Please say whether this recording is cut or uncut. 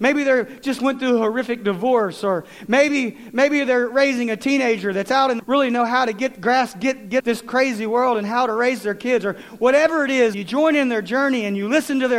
cut